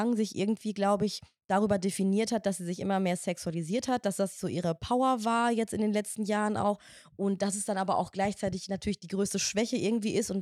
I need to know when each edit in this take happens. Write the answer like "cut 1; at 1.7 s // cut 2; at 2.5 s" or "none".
none